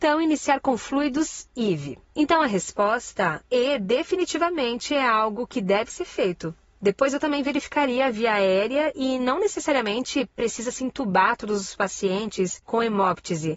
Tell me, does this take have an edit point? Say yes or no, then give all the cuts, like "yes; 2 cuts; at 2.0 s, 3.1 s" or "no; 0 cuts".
yes; 1 cut; at 2.1 s